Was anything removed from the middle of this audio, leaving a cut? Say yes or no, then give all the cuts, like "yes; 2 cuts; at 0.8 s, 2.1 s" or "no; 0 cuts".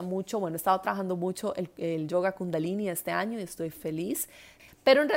no; 0 cuts